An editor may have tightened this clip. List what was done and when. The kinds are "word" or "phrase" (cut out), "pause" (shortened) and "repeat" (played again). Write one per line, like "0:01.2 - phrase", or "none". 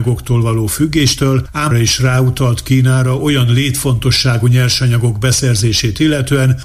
0:01.7 - word